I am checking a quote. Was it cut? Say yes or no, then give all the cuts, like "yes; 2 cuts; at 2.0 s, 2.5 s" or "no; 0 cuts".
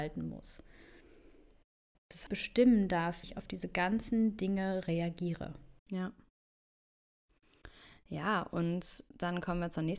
yes; 4 cuts; at 1.9 s, 2.3 s, 3.2 s, 5.8 s